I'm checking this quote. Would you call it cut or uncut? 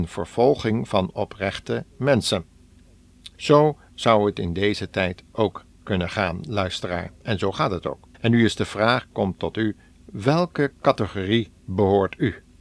cut